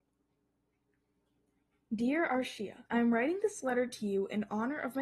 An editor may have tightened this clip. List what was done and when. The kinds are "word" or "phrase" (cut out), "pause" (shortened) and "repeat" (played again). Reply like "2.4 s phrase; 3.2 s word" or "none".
2.9 s pause